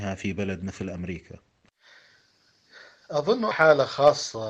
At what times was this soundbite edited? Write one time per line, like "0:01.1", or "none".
0:03.5